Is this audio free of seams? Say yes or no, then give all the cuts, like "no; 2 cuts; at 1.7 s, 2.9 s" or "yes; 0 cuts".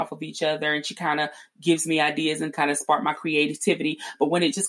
no; 1 cut; at 2.5 s